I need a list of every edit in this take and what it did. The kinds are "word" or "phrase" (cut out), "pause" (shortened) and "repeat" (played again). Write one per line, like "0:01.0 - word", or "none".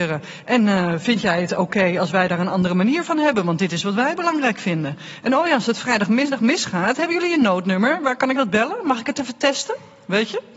none